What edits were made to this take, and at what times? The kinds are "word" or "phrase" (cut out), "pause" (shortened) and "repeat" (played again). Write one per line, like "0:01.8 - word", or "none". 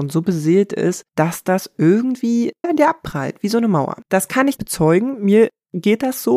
0:01.1 - pause
0:02.6 - word
0:04.0 - pause
0:04.6 - word